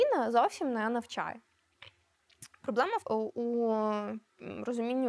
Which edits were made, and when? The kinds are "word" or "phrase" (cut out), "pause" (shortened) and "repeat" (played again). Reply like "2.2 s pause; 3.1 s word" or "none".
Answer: 3.0 s phrase